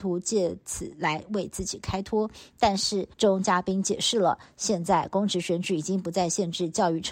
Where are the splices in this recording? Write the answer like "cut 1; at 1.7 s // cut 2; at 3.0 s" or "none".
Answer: cut 1; at 3.1 s